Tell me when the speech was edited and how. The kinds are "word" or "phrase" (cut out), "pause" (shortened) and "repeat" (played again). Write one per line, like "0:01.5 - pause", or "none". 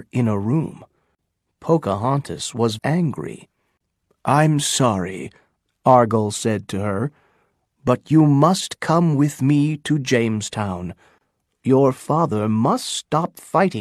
0:02.8 - word